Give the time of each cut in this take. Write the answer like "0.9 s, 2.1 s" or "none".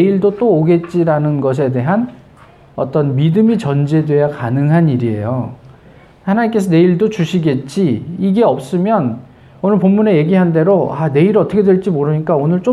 none